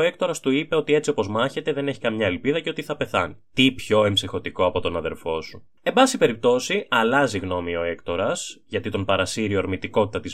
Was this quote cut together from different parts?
yes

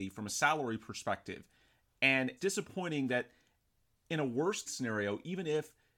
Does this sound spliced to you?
yes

